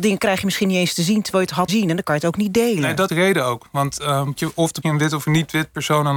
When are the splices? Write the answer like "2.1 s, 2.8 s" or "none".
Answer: 1.7 s, 3.1 s, 4.4 s, 4.8 s